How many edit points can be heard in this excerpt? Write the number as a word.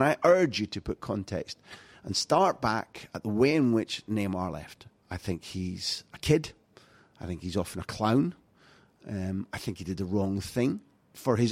zero